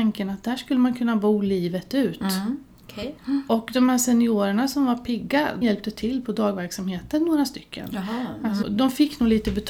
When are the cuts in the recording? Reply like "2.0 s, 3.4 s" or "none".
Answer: 3.2 s, 5.6 s, 8.6 s